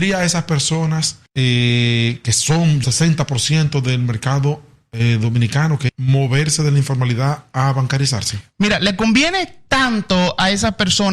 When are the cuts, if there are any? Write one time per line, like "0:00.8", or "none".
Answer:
0:02.8
0:05.9